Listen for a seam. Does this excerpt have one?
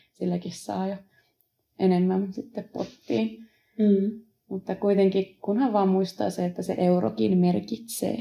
no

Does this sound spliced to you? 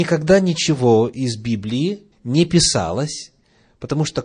yes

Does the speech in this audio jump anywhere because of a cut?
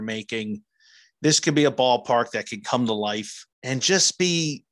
yes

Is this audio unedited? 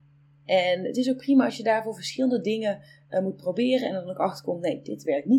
yes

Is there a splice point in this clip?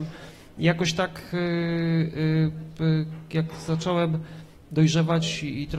no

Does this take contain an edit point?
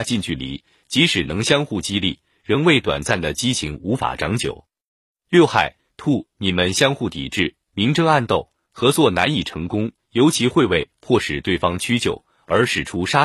no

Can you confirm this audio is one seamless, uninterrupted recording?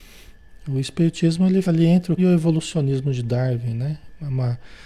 no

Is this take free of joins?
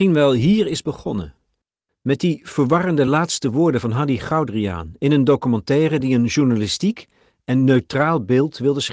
yes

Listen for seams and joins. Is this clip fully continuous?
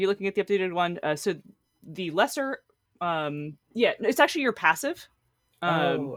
no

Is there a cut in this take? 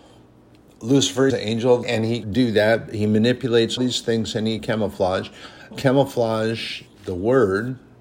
yes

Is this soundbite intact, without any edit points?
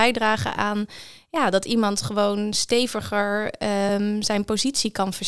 yes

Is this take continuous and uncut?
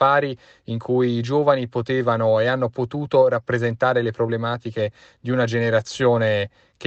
yes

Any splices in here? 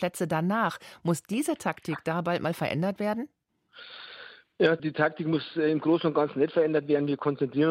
no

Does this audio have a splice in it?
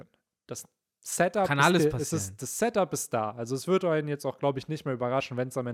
no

